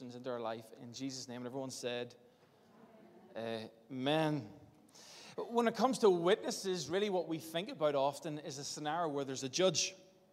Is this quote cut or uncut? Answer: uncut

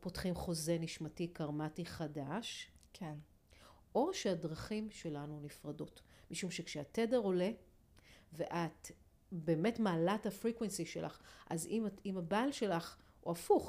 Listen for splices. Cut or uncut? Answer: uncut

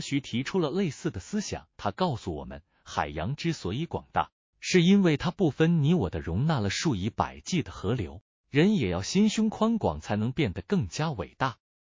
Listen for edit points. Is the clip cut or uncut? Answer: cut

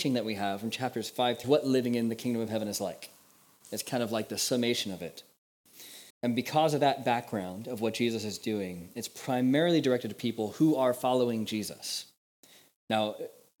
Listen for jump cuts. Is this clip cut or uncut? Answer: cut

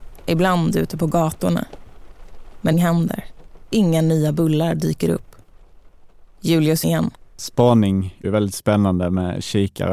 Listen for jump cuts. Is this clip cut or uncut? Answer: cut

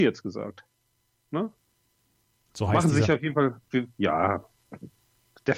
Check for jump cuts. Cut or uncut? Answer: uncut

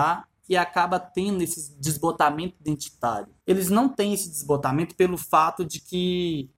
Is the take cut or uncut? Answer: uncut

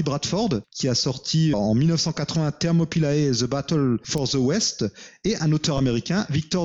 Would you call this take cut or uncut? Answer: cut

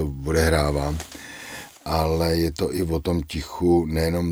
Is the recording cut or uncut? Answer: uncut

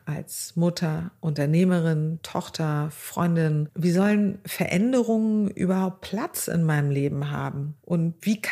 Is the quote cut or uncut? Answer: uncut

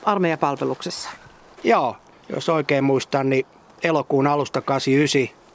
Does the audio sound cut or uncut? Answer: uncut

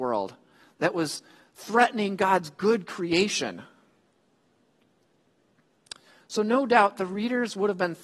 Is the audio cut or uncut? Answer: uncut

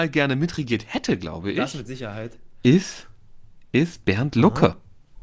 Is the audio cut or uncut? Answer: uncut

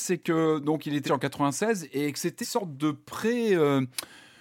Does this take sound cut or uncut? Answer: cut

